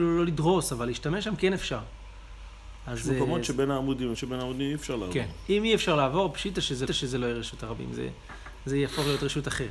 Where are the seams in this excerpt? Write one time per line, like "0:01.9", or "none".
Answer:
0:04.1
0:06.9